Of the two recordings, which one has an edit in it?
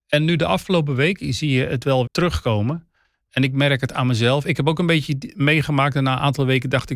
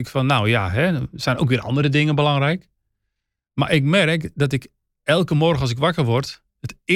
first; 1 cut; at 2.1 s

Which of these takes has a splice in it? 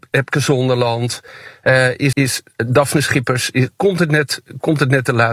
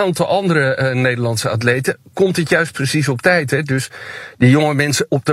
first; 1 cut; at 2.1 s

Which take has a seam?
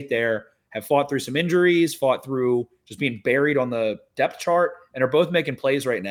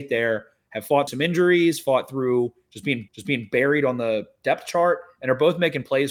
second; 2 cuts; at 1.1 s, 3.1 s

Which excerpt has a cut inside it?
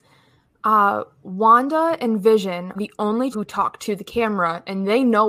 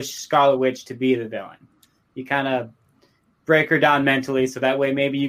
first; 2 cuts; at 2.7 s, 3.3 s

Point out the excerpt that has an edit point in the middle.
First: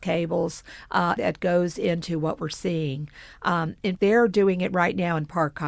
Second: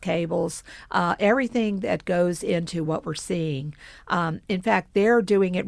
first; 2 cuts; at 1.2 s, 4.0 s

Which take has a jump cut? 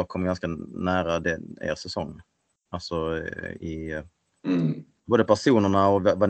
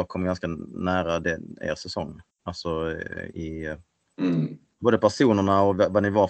second; 1 cut; at 2.3 s

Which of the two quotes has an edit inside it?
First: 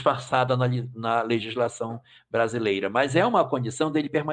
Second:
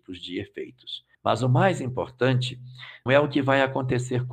second; 2 cuts; at 1.1 s, 3.1 s

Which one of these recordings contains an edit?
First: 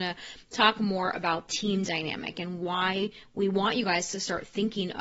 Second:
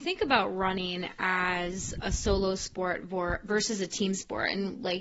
first; 1 cut; at 1.5 s

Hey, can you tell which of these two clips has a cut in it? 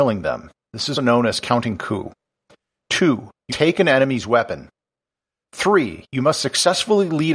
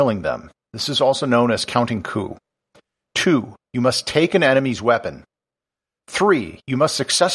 first; 2 cuts; at 0.9 s, 3.5 s

